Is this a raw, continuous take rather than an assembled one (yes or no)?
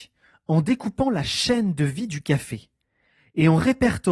yes